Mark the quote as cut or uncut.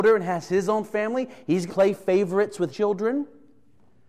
cut